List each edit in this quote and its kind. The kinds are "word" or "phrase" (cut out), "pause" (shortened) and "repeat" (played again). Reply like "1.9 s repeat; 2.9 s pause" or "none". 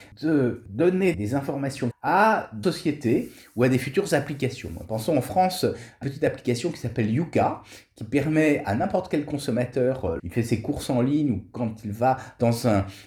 1.1 s word; 1.9 s word; 2.6 s word; 6.0 s word; 10.2 s word